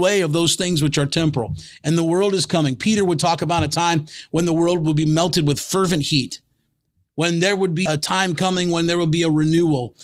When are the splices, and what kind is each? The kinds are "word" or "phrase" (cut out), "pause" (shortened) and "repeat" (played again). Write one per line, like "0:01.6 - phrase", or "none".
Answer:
0:07.9 - word